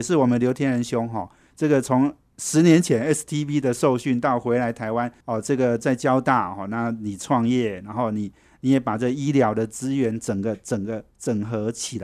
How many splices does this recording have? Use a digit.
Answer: 2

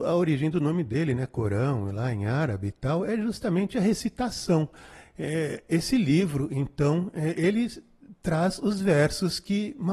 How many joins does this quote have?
0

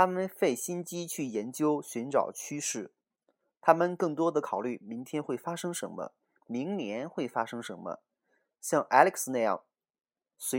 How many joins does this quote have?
0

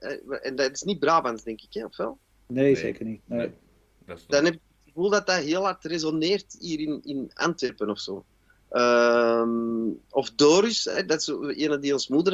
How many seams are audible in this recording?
0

